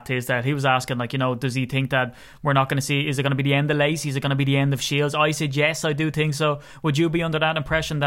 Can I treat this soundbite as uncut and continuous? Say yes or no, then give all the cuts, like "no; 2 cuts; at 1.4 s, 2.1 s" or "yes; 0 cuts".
yes; 0 cuts